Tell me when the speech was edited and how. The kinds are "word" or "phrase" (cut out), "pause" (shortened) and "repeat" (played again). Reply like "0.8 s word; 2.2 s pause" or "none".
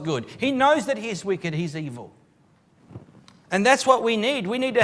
3.2 s pause